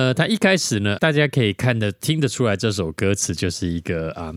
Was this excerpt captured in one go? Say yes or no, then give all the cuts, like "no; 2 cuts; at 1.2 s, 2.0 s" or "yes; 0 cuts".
no; 1 cut; at 1.0 s